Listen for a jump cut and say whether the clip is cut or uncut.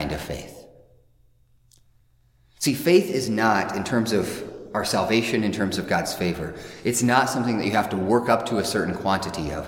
uncut